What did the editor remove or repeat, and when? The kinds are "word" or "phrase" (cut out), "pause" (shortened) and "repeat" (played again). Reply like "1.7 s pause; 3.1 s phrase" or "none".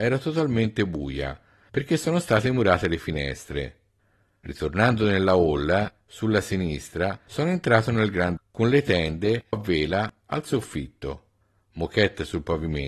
8.4 s word; 9.5 s word